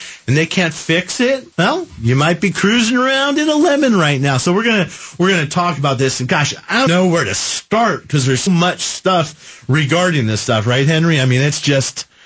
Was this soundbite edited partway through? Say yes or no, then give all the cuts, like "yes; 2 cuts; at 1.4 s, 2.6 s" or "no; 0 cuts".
yes; 3 cuts; at 1.5 s, 6.9 s, 8.5 s